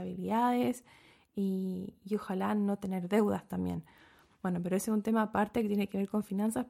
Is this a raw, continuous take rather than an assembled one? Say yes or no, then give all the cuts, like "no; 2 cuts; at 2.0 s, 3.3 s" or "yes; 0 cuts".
yes; 0 cuts